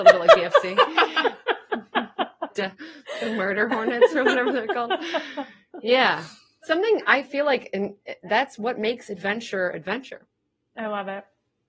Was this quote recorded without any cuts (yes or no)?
yes